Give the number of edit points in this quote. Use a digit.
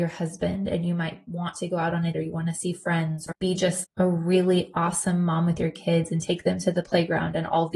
3